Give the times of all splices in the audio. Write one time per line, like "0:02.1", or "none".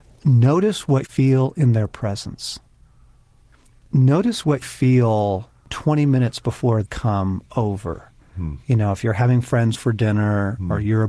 0:01.0
0:04.6
0:06.9
0:09.7